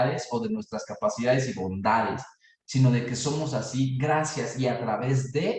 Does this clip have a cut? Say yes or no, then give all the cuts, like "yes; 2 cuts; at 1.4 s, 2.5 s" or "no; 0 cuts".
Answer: no; 0 cuts